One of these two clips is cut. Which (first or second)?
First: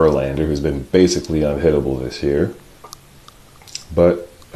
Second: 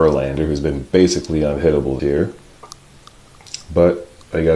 second